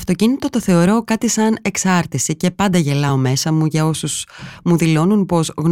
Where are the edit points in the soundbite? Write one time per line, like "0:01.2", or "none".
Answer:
none